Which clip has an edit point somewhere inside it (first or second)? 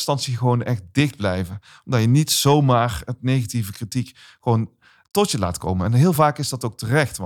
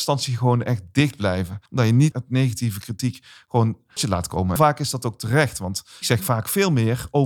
second